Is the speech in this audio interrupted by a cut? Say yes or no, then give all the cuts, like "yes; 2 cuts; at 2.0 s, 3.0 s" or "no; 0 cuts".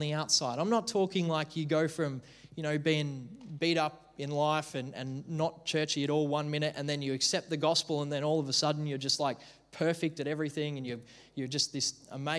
no; 0 cuts